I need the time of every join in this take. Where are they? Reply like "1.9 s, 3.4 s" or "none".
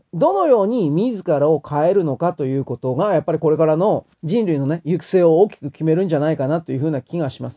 4.1 s